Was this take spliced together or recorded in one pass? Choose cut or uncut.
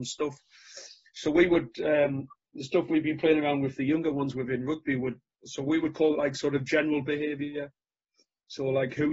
cut